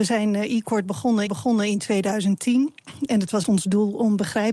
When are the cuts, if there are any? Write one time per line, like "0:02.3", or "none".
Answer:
0:01.3
0:03.4